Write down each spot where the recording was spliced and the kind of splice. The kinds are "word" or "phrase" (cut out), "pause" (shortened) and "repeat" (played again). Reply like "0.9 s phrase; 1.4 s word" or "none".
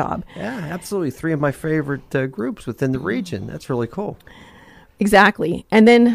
none